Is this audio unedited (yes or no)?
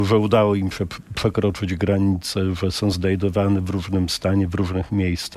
yes